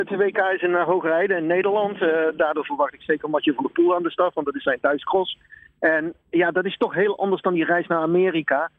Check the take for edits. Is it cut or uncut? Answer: uncut